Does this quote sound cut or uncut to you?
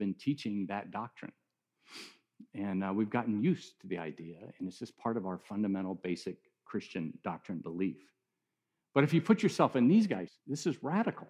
cut